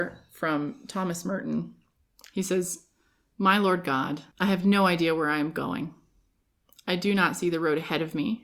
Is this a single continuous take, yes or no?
no